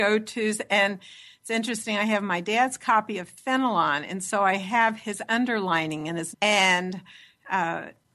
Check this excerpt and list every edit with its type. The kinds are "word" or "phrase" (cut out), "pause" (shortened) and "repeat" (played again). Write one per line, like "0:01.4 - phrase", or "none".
0:06.3 - word